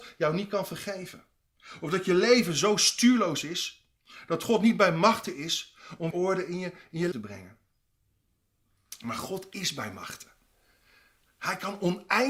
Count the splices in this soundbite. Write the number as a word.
two